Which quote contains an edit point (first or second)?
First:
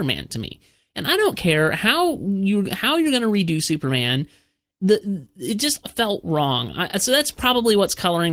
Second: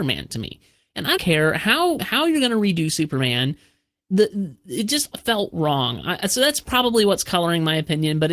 second